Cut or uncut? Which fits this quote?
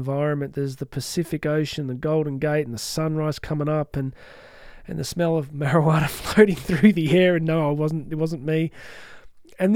uncut